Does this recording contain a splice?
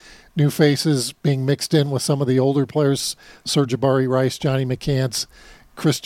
no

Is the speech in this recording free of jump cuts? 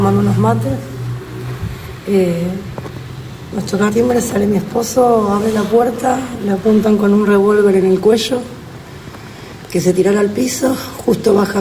no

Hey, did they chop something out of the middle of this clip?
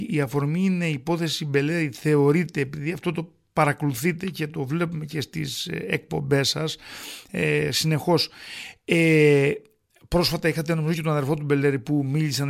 no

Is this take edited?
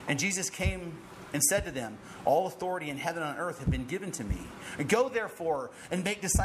no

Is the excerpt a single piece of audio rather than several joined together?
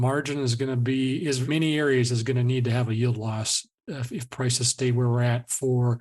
no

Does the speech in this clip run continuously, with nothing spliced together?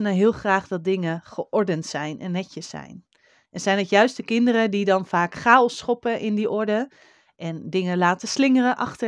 yes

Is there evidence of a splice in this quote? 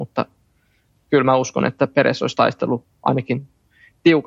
no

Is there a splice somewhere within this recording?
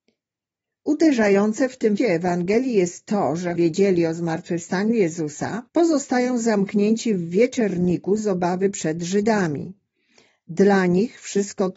yes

